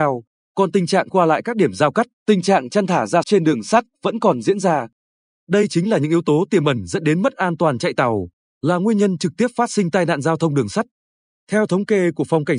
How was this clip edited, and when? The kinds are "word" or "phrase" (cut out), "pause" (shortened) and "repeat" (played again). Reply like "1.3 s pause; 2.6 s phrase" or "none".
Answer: 1.1 s phrase; 2.1 s pause; 3.2 s word